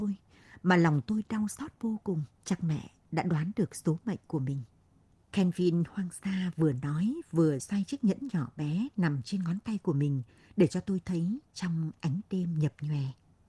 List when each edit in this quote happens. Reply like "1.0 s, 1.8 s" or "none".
2.3 s, 5.1 s, 7.6 s